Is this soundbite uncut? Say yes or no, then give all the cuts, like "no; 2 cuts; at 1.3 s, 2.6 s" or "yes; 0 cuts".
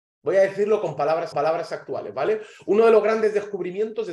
no; 1 cut; at 1.3 s